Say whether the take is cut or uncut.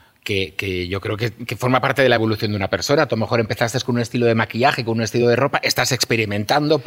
uncut